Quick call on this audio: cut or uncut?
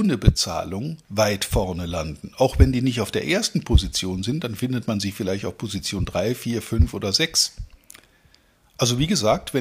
cut